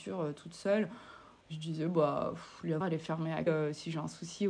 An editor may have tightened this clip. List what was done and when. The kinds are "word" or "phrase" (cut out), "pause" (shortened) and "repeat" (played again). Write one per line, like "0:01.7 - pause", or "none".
0:02.8 - word
0:03.5 - word